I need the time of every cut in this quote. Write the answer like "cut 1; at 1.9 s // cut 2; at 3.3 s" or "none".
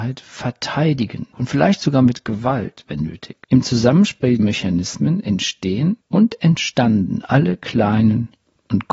cut 1; at 1.3 s // cut 2; at 3.4 s // cut 3; at 4.4 s // cut 4; at 6.0 s